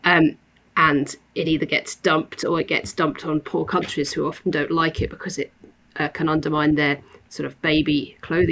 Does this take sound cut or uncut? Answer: uncut